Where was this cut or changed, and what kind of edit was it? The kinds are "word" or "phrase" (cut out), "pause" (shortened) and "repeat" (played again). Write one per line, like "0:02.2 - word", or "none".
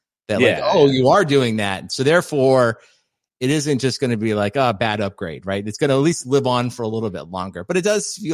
none